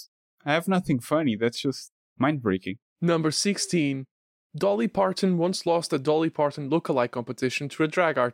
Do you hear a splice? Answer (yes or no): no